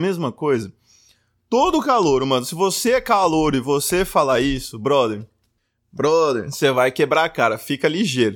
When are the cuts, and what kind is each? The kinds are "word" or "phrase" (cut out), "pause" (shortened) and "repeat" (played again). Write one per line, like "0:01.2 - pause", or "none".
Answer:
none